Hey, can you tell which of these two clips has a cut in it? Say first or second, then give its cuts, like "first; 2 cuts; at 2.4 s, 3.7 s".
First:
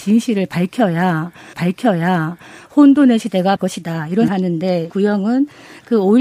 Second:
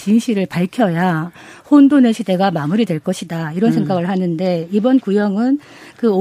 first; 4 cuts; at 1.5 s, 3.6 s, 4.3 s, 4.9 s